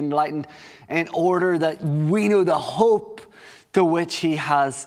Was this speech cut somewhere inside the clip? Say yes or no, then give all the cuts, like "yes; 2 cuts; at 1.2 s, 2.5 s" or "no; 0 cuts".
no; 0 cuts